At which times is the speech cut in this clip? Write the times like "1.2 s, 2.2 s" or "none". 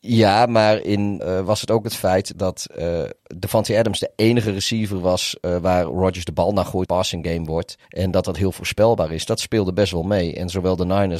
1.2 s, 2.3 s, 3.2 s, 6.9 s, 7.8 s